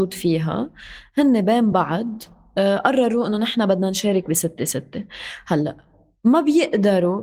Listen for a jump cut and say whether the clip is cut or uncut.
uncut